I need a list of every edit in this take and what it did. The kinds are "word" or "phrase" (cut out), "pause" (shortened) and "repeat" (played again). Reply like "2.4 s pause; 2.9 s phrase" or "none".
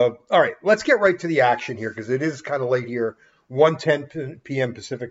none